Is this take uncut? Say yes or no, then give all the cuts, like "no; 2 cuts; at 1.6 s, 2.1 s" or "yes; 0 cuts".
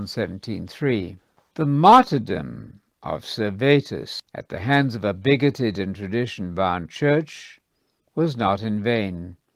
no; 1 cut; at 4.3 s